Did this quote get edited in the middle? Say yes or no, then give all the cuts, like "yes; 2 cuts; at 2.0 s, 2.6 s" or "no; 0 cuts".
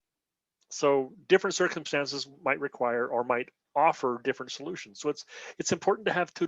no; 0 cuts